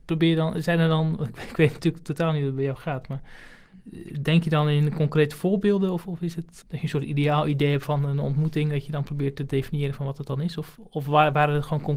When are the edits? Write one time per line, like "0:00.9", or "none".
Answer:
none